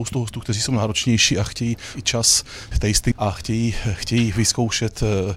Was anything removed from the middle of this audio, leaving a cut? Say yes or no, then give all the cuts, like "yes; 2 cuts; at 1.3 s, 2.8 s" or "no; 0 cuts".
yes; 3 cuts; at 1.9 s, 2.7 s, 3.1 s